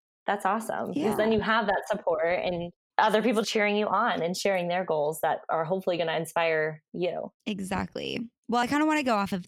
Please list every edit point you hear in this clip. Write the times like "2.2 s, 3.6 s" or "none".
3.4 s, 7.4 s